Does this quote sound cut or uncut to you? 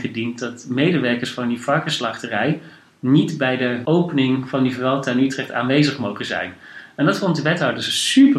uncut